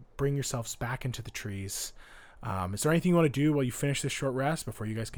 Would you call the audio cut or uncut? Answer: uncut